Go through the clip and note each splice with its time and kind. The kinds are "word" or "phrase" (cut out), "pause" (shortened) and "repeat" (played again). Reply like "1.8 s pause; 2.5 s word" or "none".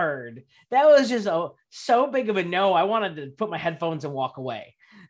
none